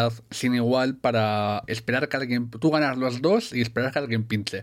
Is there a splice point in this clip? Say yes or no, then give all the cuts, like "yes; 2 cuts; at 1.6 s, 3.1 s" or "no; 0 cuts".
yes; 1 cut; at 1.7 s